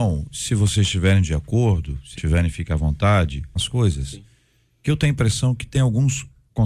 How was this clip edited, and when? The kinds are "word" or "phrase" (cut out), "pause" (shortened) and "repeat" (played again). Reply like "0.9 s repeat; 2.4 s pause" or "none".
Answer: 2.2 s word; 3.6 s word